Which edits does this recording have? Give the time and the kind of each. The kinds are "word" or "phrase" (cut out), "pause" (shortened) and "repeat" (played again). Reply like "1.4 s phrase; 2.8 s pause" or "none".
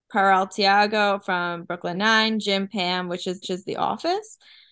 1.9 s word; 3.4 s repeat